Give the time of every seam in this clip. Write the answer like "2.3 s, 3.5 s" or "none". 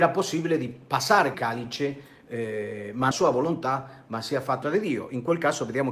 1.3 s, 3.1 s, 4.6 s